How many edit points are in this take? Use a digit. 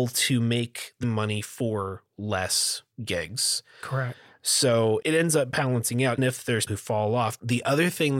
5